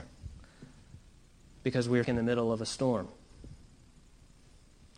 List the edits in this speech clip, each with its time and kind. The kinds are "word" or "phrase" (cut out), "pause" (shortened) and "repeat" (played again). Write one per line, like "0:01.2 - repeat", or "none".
0:02.0 - word